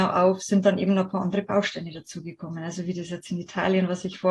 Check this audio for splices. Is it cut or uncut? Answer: uncut